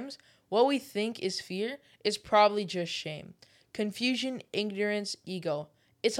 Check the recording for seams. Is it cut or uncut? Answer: uncut